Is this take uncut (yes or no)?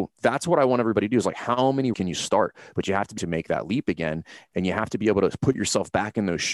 no